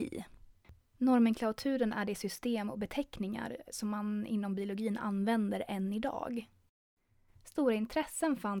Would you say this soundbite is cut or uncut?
uncut